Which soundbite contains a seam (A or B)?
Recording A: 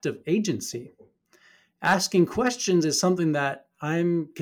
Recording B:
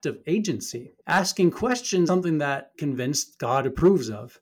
B